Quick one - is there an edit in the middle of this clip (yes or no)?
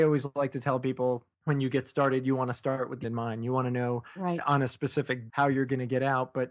yes